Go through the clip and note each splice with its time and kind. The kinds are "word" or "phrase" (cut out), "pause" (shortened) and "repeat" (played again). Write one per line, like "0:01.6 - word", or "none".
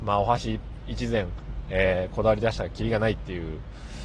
none